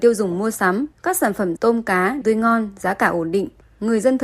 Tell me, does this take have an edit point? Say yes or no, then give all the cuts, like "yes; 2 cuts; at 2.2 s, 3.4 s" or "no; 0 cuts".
yes; 3 cuts; at 0.9 s, 1.6 s, 2.2 s